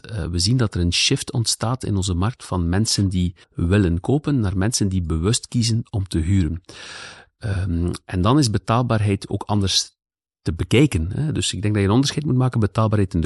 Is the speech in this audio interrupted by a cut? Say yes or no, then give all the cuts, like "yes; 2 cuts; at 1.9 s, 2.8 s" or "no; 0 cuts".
yes; 1 cut; at 3.4 s